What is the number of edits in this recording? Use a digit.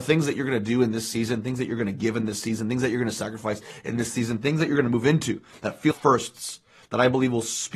1